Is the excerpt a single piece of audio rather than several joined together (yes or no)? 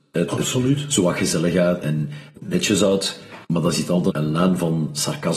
no